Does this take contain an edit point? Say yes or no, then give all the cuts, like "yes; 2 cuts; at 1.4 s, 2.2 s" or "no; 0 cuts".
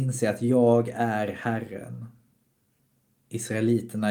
no; 0 cuts